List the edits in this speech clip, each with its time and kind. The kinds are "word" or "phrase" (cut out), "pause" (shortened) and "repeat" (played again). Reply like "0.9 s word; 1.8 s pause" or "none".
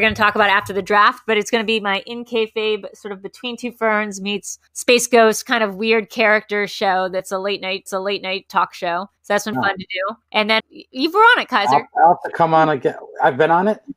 4.7 s pause; 7.9 s repeat; 9.2 s pause; 9.5 s word; 10.2 s pause; 10.6 s word